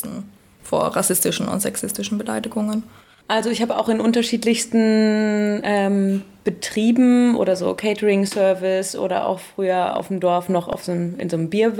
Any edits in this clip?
no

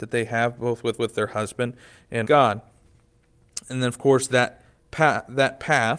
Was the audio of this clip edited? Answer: yes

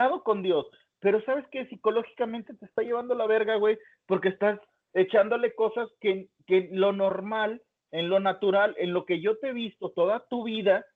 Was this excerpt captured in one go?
yes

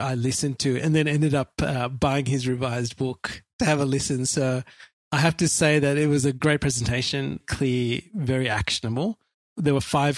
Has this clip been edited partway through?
yes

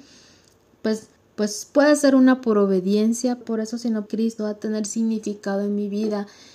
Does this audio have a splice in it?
yes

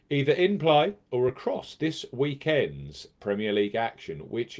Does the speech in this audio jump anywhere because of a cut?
no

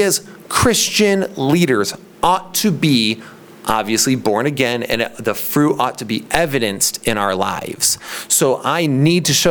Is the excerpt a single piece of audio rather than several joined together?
yes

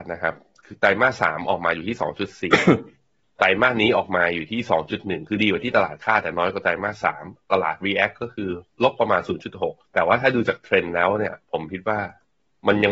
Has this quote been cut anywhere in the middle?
yes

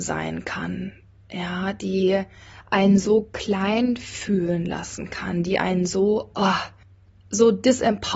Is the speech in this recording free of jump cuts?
yes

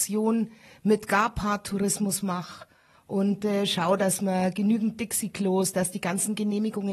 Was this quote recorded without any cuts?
yes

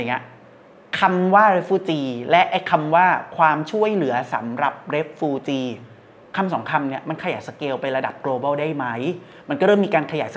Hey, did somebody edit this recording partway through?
no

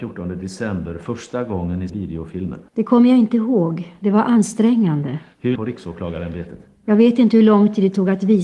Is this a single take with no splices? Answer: no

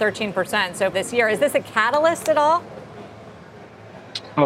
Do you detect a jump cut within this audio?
yes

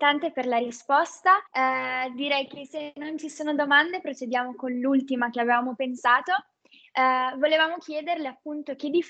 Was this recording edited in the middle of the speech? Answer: yes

